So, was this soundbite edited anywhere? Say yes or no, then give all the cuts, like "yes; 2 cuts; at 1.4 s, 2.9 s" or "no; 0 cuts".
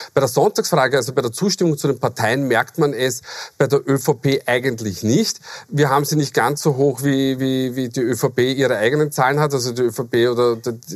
no; 0 cuts